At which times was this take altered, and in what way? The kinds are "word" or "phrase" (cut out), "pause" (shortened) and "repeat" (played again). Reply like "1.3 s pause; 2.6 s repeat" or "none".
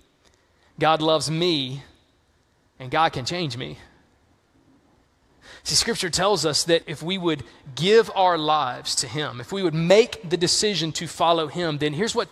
6.8 s word